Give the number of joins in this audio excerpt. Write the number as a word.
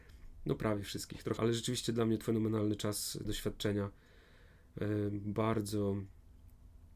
three